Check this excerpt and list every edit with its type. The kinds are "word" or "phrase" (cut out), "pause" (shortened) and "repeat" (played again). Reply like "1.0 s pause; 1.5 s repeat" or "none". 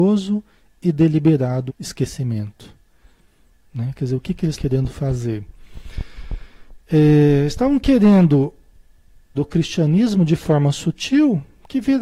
1.7 s word; 4.5 s word; 9.3 s word

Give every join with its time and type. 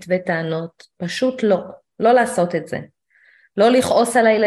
none

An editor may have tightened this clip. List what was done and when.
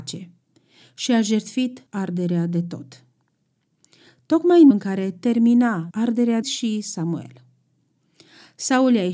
1.9 s pause; 4.7 s word; 5.9 s phrase; 6.4 s phrase

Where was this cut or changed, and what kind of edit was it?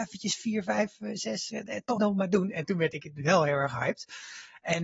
2.0 s word

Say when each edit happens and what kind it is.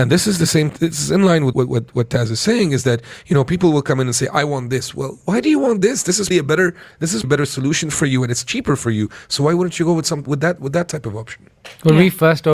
1.5 s word; 6.3 s word; 7.2 s word; 10.3 s word

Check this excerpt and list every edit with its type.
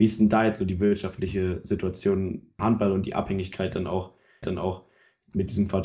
2.6 s word; 4.4 s repeat

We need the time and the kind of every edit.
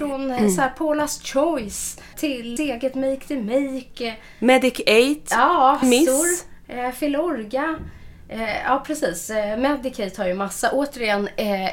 2.1 s word; 2.6 s word; 5.8 s word

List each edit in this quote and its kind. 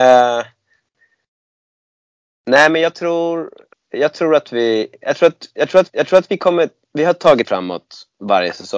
3.7 s pause; 5.9 s repeat; 7.4 s word

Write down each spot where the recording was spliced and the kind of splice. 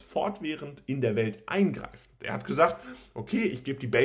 none

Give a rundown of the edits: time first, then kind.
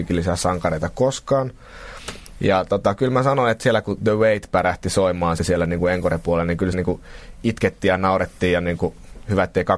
5.4 s word; 6.7 s word

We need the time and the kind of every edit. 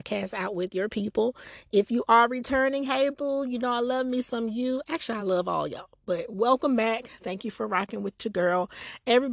none

